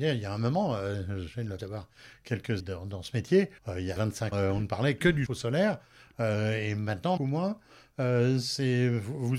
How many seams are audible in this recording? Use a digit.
7